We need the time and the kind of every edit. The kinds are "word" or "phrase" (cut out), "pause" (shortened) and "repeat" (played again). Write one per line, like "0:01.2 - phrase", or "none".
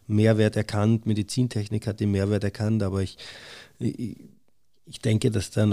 none